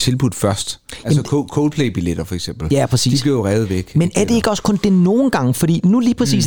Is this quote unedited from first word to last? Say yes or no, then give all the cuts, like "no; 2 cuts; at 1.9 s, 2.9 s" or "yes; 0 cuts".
yes; 0 cuts